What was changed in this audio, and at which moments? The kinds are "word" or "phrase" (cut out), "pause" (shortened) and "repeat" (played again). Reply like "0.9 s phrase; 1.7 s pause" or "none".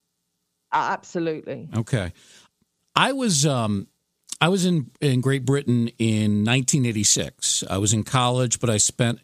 none